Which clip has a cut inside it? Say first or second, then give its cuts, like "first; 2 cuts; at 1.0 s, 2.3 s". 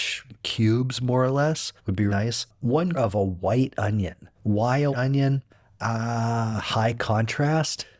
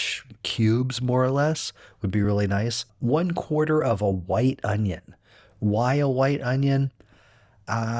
first; 6 cuts; at 1.8 s, 2.1 s, 2.9 s, 4.3 s, 4.9 s, 5.5 s